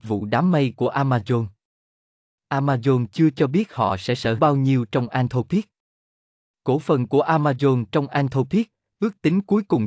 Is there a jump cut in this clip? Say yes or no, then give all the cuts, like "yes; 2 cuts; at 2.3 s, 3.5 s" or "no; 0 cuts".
yes; 1 cut; at 4.4 s